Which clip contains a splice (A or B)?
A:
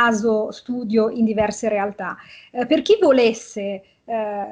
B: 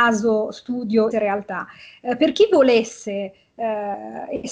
B